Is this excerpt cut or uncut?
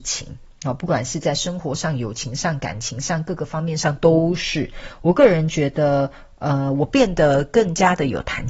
uncut